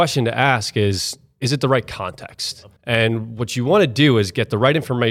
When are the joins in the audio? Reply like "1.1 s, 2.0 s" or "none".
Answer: 2.8 s